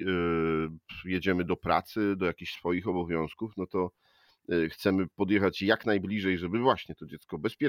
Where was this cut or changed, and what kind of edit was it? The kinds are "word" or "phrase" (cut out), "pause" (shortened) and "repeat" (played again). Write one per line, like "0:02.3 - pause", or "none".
none